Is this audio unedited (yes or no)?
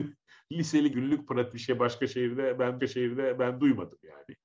no